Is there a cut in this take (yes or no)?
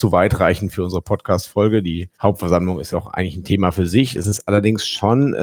yes